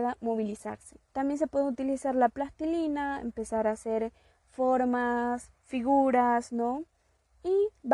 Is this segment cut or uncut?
cut